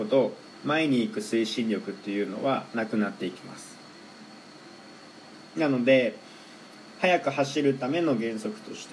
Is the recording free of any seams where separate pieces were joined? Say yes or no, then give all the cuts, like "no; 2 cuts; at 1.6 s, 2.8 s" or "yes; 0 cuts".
no; 1 cut; at 5.5 s